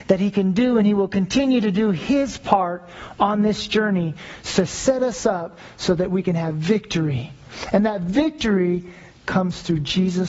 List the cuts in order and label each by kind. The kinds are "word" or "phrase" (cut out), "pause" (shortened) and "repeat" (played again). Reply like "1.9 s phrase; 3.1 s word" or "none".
none